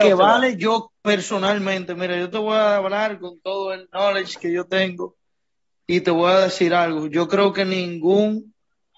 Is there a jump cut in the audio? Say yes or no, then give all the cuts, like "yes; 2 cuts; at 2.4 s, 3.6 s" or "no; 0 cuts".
no; 0 cuts